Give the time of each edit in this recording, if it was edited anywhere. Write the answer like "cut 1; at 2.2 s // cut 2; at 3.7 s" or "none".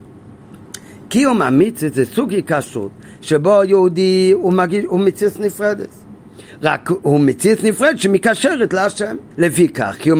cut 1; at 9.3 s